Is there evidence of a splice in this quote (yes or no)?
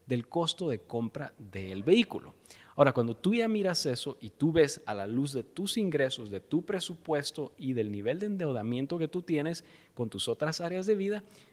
no